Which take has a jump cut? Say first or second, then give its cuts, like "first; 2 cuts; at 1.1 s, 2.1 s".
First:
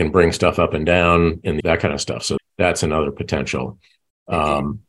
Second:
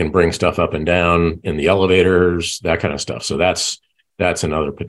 first; 2 cuts; at 1.6 s, 2.4 s